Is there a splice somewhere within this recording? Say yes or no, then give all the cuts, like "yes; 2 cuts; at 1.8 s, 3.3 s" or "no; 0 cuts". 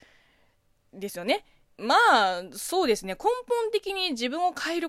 yes; 1 cut; at 1.6 s